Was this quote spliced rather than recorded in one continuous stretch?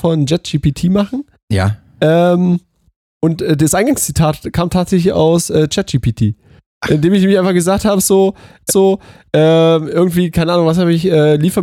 yes; 1 cut; at 8.7 s

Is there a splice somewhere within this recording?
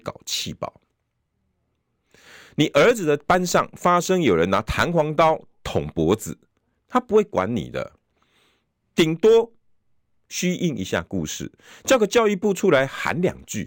no; 0 cuts

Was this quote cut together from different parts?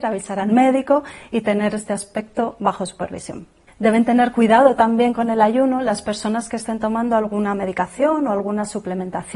no; 0 cuts

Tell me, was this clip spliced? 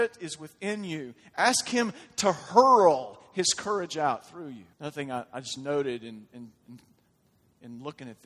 yes; 1 cut; at 4.7 s

